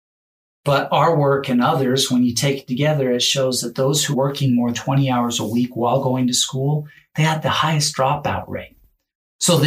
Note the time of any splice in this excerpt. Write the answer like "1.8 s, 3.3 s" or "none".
4.1 s, 4.7 s